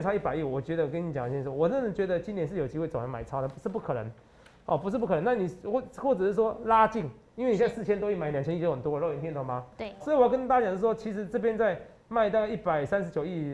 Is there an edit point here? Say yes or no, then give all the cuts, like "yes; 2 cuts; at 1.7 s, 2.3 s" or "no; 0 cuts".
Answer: yes; 1 cut; at 10.0 s